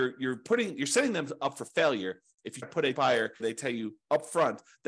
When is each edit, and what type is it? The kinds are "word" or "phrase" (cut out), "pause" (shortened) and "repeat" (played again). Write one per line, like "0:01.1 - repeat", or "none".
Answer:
0:02.6 - word
0:02.9 - word
0:03.4 - phrase